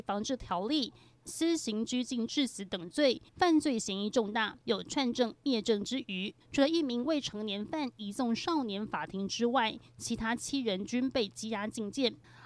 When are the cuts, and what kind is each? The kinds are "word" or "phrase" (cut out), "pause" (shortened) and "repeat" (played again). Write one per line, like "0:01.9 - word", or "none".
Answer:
0:01.2 - phrase
0:03.3 - pause
0:04.6 - pause
0:06.4 - pause